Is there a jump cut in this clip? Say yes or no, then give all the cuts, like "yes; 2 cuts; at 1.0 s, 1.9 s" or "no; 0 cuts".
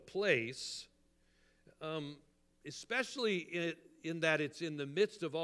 no; 0 cuts